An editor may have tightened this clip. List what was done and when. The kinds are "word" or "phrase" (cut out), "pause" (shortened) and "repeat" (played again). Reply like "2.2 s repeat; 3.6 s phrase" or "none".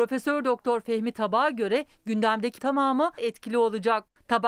2.6 s word; 3.2 s phrase